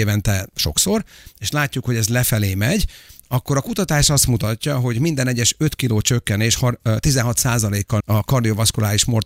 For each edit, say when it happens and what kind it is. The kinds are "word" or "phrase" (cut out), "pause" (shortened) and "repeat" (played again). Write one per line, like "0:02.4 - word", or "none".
0:08.0 - word

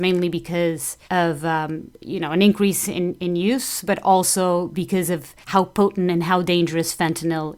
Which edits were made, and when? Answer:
0:01.1 - pause
0:05.4 - pause

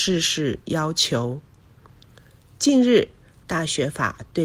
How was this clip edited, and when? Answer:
none

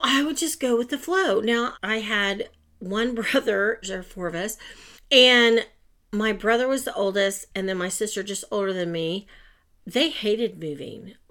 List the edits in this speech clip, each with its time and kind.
0:01.7 - word
0:03.8 - phrase
0:04.9 - pause

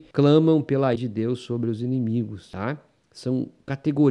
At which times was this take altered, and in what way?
0:01.0 - word

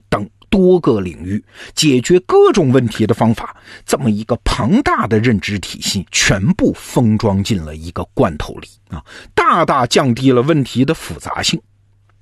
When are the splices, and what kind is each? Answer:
0:06.1 - pause
0:08.8 - pause

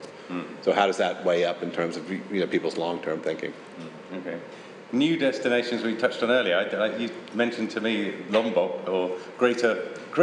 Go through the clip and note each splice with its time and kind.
none

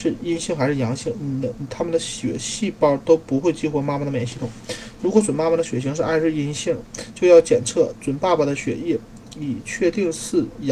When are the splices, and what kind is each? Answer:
none

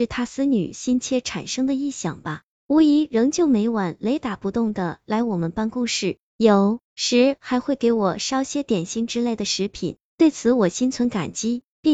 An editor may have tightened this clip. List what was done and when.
0:06.9 - pause

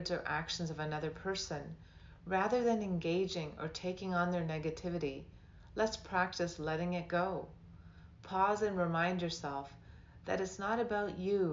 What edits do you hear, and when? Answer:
none

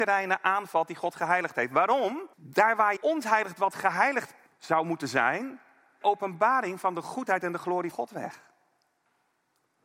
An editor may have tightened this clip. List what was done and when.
0:02.3 - pause
0:03.0 - word
0:04.5 - pause
0:06.0 - phrase
0:07.9 - word

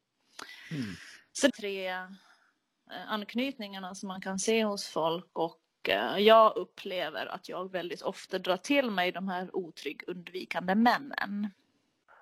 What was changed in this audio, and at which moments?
0:01.5 - phrase
0:05.3 - pause

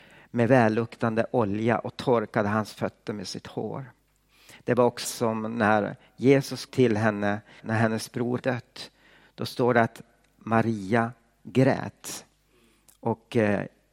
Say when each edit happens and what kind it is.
0:05.0 - word
0:06.7 - word
0:07.6 - word
0:08.4 - word

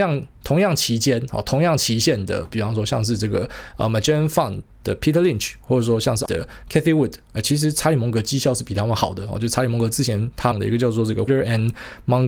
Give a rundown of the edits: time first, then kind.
0:06.3 - phrase
0:10.5 - word
0:11.3 - word

